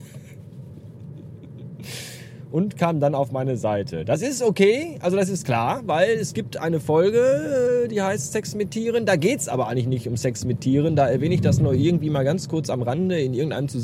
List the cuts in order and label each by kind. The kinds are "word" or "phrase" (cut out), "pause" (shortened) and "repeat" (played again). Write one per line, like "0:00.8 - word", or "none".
none